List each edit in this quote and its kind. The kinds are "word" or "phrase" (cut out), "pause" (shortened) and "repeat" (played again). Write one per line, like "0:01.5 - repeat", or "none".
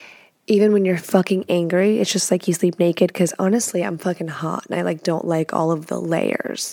none